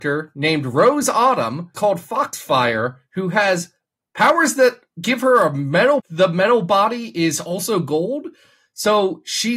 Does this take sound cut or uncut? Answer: cut